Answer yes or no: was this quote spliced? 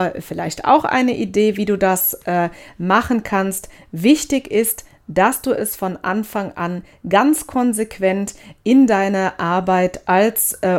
no